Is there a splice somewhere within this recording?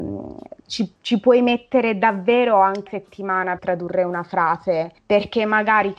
yes; 4 cuts; at 1.0 s, 2.9 s, 3.6 s, 5.0 s

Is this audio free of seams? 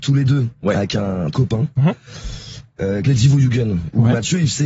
no; 2 cuts; at 1.3 s, 3.1 s

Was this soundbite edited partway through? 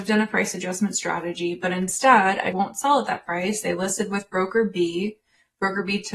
yes; 1 cut; at 2.5 s

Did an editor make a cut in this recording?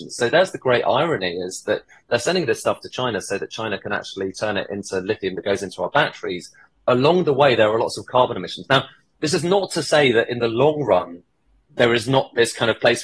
no; 0 cuts

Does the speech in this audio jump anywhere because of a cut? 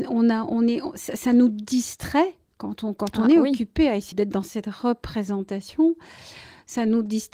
yes; 1 cut; at 4.1 s

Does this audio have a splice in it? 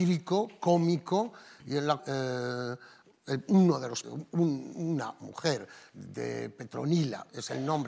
yes; 2 cuts; at 2.0 s, 4.0 s

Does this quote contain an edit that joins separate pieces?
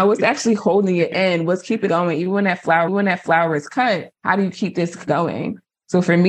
yes; 4 cuts; at 1.9 s, 2.9 s, 4.1 s, 5.1 s

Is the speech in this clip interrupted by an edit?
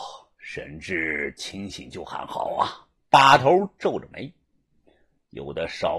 yes; 1 cut; at 3.0 s

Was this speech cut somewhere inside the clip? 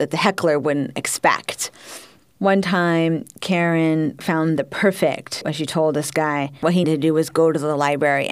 yes; 2 cuts; at 5.4 s, 6.8 s

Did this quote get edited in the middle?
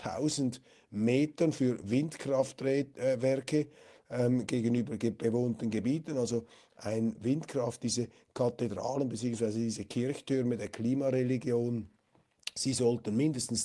no; 0 cuts

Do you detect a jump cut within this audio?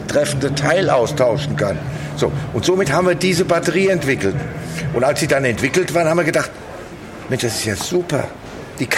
no; 0 cuts

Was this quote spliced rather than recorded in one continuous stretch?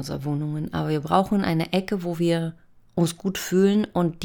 no; 0 cuts

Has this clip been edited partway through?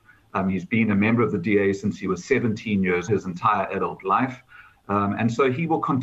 yes; 1 cut; at 3.1 s

